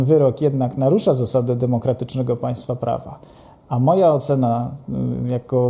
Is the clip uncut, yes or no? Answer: yes